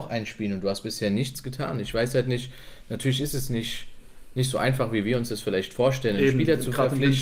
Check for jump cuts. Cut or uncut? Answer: uncut